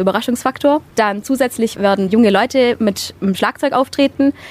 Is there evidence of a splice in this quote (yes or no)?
yes